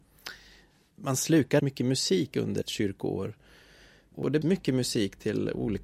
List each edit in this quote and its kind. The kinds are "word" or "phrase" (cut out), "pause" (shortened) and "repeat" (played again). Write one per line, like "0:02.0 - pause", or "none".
0:01.6 - word
0:02.6 - word
0:04.4 - word